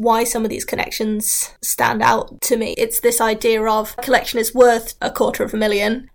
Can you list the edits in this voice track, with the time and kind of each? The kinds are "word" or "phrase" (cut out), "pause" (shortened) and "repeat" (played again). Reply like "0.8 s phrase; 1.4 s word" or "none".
4.0 s word